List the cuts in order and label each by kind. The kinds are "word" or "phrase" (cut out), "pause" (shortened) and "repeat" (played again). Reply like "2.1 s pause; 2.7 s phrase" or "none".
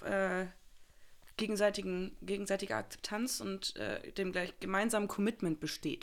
none